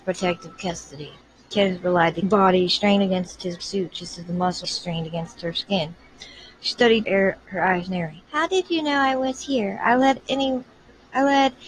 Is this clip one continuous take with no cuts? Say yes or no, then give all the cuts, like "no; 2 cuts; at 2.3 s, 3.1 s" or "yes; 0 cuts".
no; 6 cuts; at 1.2 s, 2.2 s, 3.6 s, 4.6 s, 7.0 s, 8.2 s